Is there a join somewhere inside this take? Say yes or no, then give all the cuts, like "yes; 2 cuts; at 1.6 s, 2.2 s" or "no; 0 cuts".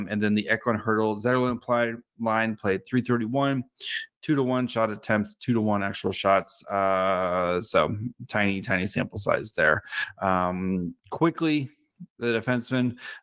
yes; 1 cut; at 11.0 s